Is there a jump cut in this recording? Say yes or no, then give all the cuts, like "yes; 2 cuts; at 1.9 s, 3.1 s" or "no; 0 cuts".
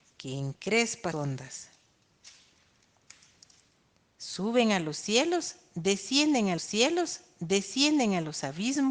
yes; 2 cuts; at 1.1 s, 6.6 s